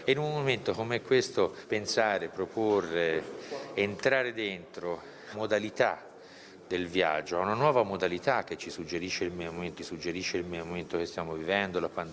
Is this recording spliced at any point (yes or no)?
yes